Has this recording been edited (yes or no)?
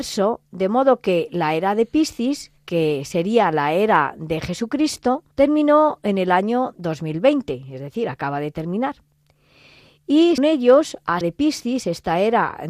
yes